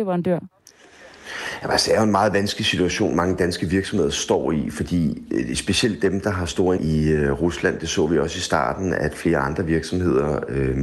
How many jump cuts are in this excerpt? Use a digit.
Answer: 1